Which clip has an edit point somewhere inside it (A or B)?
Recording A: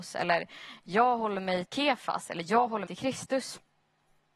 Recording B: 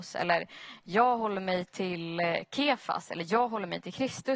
A